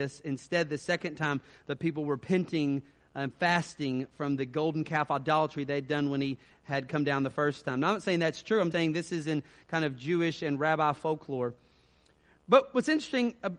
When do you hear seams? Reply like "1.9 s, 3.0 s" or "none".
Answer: 8.7 s